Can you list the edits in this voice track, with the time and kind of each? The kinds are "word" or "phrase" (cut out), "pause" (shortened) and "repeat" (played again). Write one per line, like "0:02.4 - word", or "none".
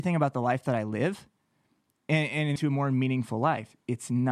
0:02.6 - phrase